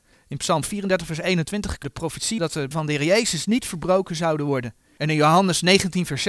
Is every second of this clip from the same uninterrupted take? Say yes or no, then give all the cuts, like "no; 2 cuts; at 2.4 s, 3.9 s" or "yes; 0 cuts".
no; 3 cuts; at 1.8 s, 2.4 s, 2.7 s